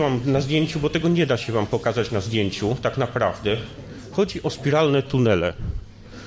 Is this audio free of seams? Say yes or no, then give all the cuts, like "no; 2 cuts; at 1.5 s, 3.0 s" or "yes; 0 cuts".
yes; 0 cuts